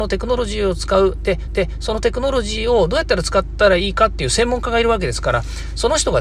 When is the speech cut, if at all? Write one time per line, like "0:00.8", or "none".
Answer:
0:01.5